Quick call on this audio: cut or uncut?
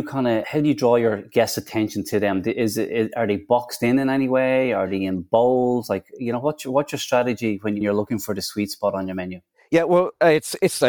uncut